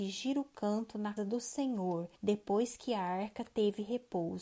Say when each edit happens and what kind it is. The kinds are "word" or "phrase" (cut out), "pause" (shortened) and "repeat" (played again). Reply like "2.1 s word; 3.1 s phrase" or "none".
1.2 s word; 2.2 s pause